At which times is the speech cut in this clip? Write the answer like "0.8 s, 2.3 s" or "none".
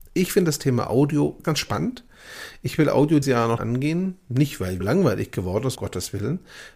1.4 s, 3.2 s, 3.6 s, 4.8 s, 5.8 s